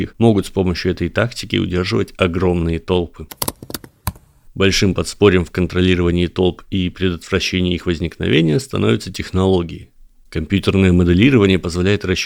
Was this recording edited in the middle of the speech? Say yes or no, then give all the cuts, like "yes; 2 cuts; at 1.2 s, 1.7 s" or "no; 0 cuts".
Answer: no; 0 cuts